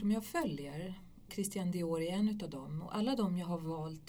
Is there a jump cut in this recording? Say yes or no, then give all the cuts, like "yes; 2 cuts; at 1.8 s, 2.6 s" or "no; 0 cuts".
yes; 1 cut; at 1.3 s